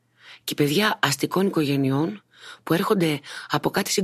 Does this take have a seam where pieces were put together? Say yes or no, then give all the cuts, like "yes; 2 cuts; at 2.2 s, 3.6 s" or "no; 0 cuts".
no; 0 cuts